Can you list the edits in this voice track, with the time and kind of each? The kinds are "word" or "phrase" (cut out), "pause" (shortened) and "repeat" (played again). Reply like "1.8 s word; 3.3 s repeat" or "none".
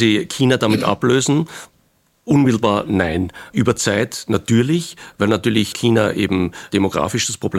none

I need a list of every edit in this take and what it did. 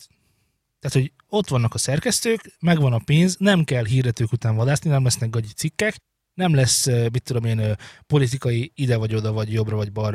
none

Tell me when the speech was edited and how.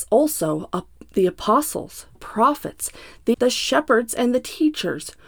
2.2 s word; 3.3 s word

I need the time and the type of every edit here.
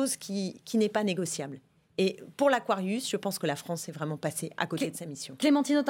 none

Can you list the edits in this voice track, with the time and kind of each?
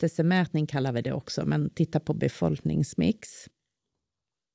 none

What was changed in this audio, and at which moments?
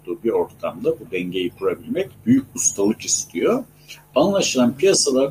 2.1 s pause

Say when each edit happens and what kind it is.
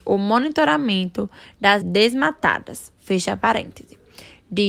1.8 s word

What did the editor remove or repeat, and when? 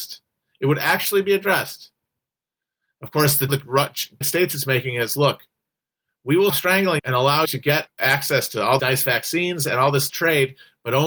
3.5 s word; 4.2 s word; 6.5 s word; 7.0 s word; 7.4 s word; 7.9 s word; 8.8 s word; 10.1 s word

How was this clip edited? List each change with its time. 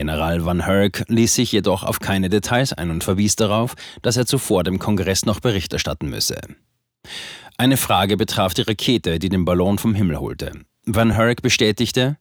none

